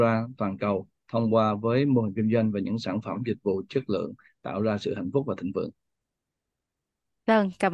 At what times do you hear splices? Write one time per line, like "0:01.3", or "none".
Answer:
none